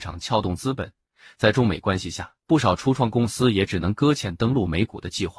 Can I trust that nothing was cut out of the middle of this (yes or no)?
yes